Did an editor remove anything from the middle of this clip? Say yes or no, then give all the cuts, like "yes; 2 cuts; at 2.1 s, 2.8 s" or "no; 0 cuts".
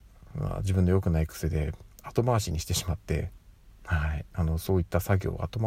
no; 0 cuts